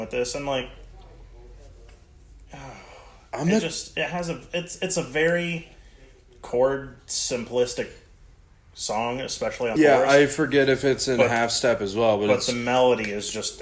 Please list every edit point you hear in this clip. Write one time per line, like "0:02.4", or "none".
0:09.8

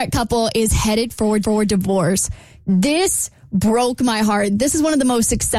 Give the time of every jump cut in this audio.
0:01.4

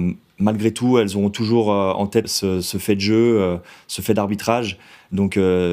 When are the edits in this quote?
0:02.2

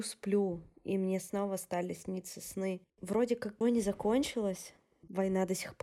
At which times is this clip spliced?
0:02.9
0:03.6

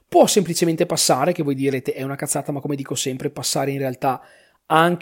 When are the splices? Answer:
none

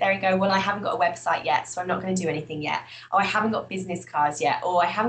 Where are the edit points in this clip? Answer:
none

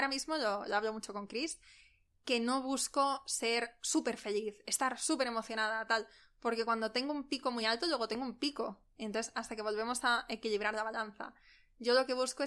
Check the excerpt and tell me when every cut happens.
none

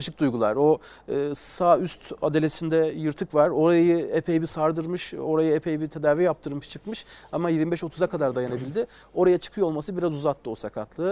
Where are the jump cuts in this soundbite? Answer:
none

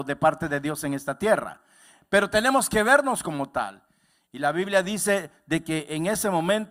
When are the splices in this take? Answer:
none

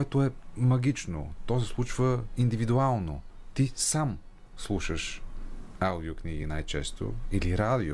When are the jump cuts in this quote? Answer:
none

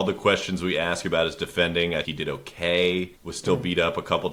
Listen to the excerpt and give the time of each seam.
0:02.0
0:03.2

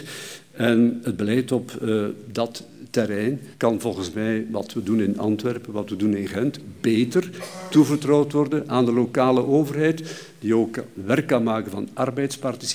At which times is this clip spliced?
0:03.5

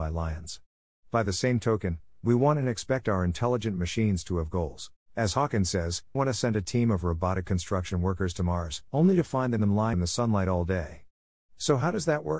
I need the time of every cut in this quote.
0:05.0
0:06.1
0:08.9
0:09.9

